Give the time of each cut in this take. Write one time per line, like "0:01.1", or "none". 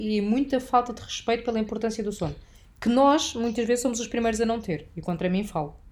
none

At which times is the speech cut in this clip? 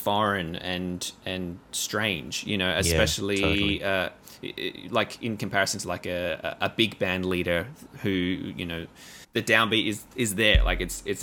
0:09.2

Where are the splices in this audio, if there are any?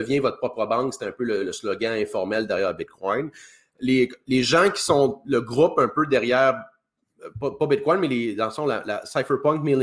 none

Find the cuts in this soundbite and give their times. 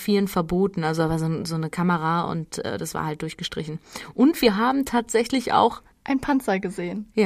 0:05.9

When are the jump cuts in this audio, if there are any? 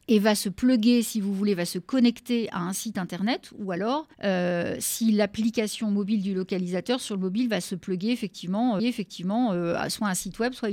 0:04.1
0:08.8

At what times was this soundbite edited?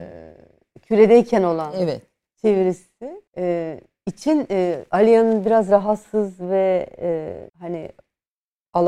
0:03.3
0:07.5

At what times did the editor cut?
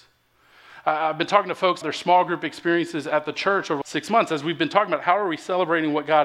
0:01.8
0:03.8

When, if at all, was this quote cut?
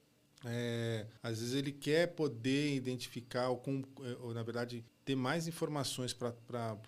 0:01.2
0:04.9

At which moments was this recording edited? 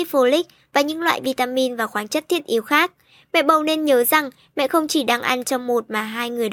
none

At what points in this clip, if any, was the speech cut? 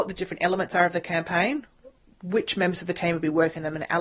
none

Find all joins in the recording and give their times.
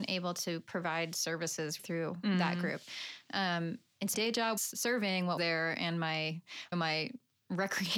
0:01.8
0:04.1
0:04.6
0:05.4
0:06.7

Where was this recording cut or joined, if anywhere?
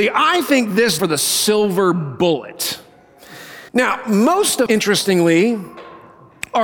0:01.0
0:03.7
0:04.7

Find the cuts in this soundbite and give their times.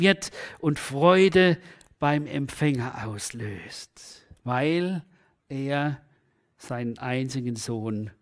0:04.4

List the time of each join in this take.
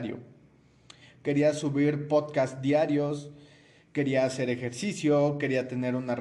none

